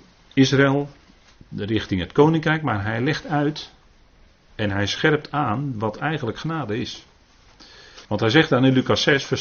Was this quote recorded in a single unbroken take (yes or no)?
no